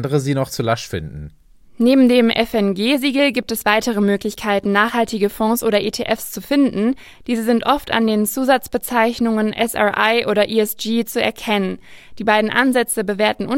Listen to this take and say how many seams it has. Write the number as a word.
zero